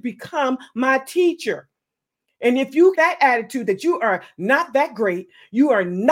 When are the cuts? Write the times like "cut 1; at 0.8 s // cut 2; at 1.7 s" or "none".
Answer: cut 1; at 3.0 s